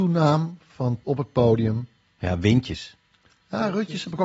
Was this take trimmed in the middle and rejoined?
yes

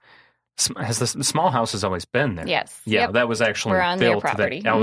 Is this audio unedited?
yes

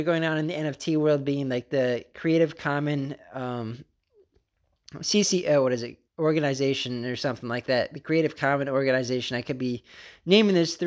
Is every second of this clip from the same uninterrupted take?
no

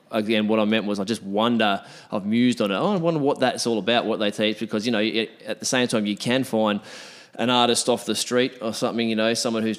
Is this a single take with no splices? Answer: yes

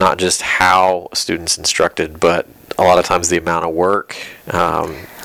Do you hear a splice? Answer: no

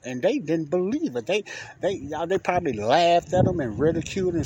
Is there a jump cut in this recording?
no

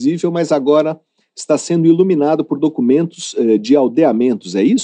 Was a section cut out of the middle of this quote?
no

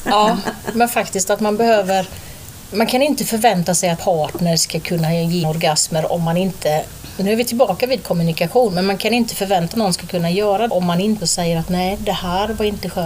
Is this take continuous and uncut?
no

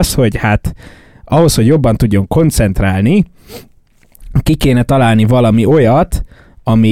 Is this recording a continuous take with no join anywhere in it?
yes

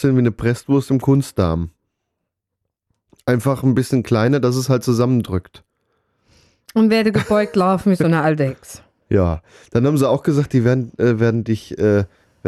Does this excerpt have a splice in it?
no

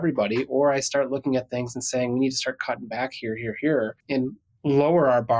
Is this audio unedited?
no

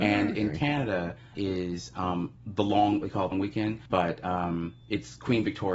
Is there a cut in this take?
yes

